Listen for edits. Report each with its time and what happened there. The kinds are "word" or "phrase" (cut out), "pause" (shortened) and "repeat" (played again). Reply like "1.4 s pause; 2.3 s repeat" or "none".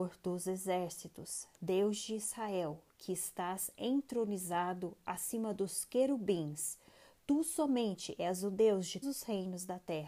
9.0 s word